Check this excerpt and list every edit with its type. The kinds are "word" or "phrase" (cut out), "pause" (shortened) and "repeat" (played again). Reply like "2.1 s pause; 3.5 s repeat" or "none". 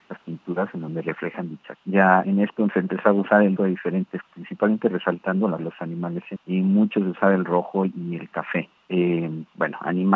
1.7 s word; 2.2 s word; 3.6 s word; 4.3 s word; 5.6 s word; 6.4 s word